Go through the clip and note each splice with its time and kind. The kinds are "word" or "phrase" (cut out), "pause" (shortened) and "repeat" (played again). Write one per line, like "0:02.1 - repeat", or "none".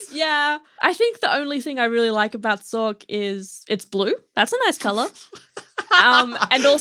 none